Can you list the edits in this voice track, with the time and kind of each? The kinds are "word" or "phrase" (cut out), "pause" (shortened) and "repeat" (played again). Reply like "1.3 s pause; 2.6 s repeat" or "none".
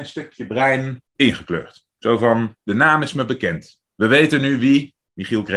1.1 s pause; 2.7 s phrase